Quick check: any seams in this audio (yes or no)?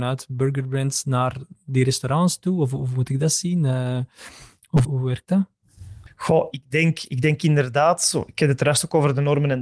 yes